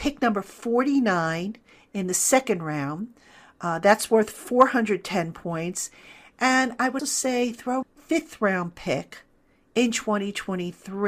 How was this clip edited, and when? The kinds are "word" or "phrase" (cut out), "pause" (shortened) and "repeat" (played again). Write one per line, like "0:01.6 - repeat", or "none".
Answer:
0:07.0 - word
0:07.8 - phrase